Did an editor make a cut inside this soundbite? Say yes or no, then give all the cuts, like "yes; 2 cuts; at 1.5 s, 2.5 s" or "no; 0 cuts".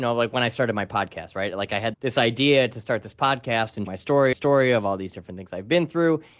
yes; 3 cuts; at 1.9 s, 3.9 s, 4.3 s